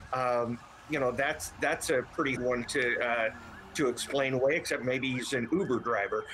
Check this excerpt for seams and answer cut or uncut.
cut